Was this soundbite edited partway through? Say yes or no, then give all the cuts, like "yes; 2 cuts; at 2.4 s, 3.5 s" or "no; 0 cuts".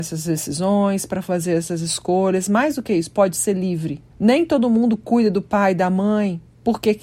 yes; 1 cut; at 4.1 s